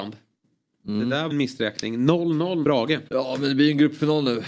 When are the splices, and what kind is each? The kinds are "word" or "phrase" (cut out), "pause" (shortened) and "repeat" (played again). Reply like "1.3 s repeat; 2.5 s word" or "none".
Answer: 1.3 s phrase; 2.6 s word; 3.1 s pause